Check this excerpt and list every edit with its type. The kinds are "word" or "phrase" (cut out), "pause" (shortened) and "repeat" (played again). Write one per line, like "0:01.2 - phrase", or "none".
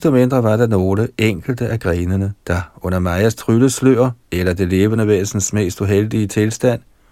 0:02.4 - pause
0:04.2 - pause